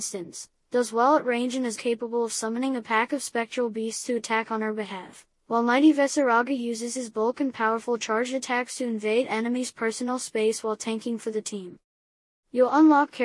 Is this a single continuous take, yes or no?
no